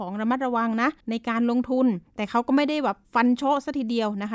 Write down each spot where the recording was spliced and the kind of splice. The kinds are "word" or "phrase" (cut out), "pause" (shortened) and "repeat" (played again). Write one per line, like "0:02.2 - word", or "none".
0:01.0 - pause
0:02.1 - pause
0:03.0 - pause